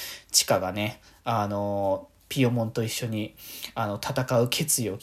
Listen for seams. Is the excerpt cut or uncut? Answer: uncut